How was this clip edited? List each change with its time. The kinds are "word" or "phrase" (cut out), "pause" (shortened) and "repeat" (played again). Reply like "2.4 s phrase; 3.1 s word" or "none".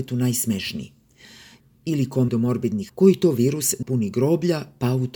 2.3 s word; 2.9 s word; 3.8 s word